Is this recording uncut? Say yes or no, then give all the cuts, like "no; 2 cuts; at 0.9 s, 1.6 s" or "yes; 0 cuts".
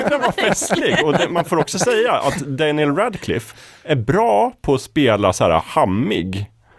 yes; 0 cuts